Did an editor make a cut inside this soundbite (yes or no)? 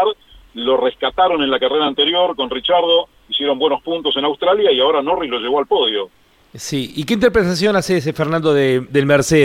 no